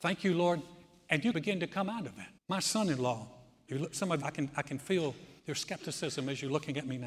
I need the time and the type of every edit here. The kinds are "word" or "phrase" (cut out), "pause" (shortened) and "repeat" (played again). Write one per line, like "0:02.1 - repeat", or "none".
0:01.3 - word
0:02.4 - pause
0:04.2 - word
0:05.4 - pause